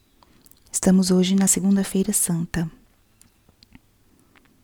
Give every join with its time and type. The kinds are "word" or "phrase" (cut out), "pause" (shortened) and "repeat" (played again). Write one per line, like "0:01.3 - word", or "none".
none